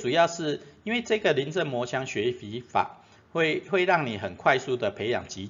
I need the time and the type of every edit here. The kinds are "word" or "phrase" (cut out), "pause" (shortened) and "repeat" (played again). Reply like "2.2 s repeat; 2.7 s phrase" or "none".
none